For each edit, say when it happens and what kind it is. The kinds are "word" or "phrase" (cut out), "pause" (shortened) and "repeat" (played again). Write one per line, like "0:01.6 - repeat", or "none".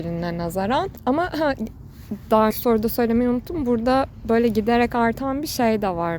0:02.5 - word